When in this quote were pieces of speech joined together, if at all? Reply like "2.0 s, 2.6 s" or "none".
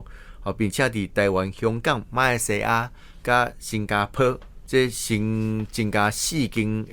4.7 s